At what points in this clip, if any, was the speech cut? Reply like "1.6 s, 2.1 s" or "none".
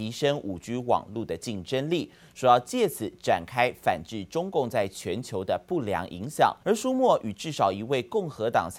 6.6 s